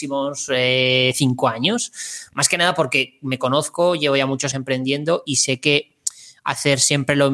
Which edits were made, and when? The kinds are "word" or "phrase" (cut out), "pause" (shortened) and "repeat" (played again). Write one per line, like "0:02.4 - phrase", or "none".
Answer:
0:04.5 - word